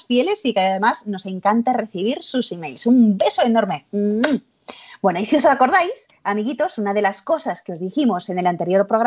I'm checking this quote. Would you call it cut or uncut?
uncut